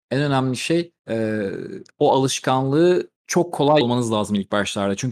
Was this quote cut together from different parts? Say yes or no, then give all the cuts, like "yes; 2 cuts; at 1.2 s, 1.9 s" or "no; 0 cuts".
yes; 3 cuts; at 1.0 s, 3.2 s, 3.8 s